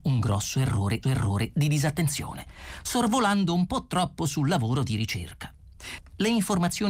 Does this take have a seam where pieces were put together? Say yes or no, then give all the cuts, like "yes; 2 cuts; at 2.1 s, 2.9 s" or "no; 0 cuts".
yes; 1 cut; at 1.0 s